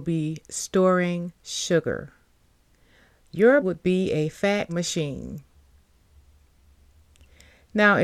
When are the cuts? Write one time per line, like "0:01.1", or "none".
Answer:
0:01.4
0:03.6
0:04.7